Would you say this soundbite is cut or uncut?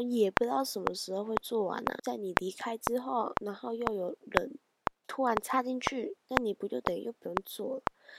uncut